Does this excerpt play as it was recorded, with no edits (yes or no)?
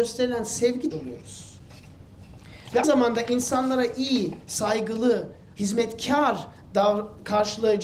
no